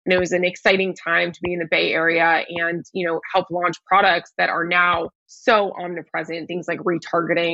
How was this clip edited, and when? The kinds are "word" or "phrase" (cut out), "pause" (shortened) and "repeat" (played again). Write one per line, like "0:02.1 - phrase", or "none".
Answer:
0:05.2 - pause